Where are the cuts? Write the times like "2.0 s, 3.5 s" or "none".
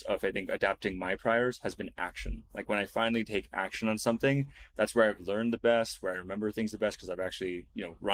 none